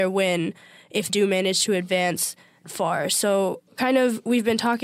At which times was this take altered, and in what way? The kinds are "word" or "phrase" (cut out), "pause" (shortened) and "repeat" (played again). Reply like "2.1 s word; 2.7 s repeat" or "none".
1.1 s word; 2.6 s word; 3.7 s pause